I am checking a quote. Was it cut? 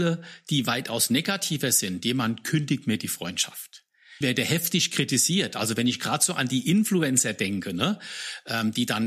yes; 1 cut; at 4.2 s

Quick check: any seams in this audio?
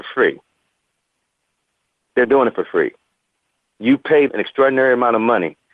yes; 2 cuts; at 2.2 s, 4.3 s

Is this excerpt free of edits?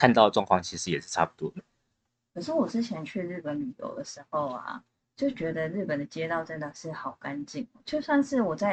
yes; 0 cuts

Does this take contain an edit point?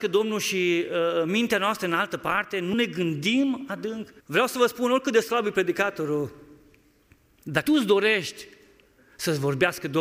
yes; 3 cuts; at 2.7 s, 4.2 s, 7.7 s

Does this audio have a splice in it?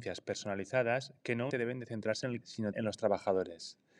yes; 3 cuts; at 1.5 s, 2.4 s, 2.7 s

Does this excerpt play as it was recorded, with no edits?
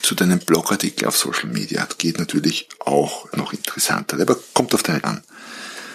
no; 2 cuts; at 3.3 s, 5.0 s

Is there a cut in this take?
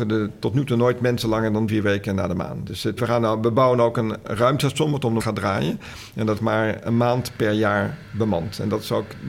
yes; 4 cuts; at 1.7 s, 3.0 s, 5.2 s, 6.4 s

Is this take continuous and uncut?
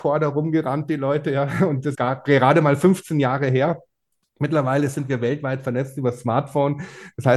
no; 1 cut; at 1.9 s

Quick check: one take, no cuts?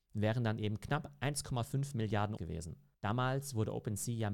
no; 1 cut; at 2.4 s

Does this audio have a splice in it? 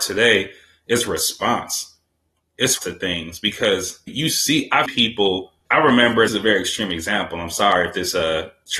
yes; 5 cuts; at 2.8 s, 4.1 s, 4.9 s, 5.7 s, 6.3 s

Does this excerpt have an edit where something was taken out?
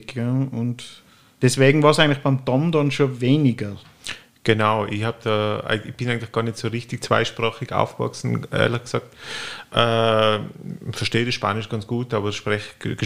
no; 0 cuts

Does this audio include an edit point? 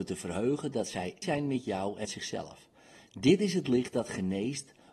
yes; 2 cuts; at 1.2 s, 2.0 s

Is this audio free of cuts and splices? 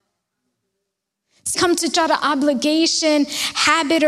no; 2 cuts; at 1.5 s, 1.9 s

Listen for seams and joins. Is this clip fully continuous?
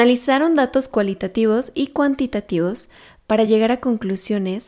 yes; 0 cuts

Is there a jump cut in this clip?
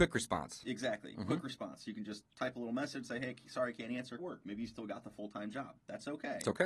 yes; 1 cut; at 4.2 s

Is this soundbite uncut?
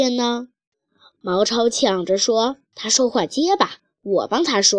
no; 1 cut; at 2.6 s

